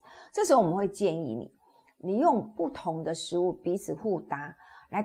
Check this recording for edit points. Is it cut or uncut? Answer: uncut